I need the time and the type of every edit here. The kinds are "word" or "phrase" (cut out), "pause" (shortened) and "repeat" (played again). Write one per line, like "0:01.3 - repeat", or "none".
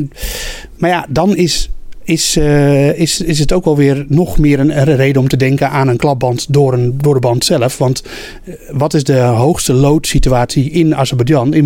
none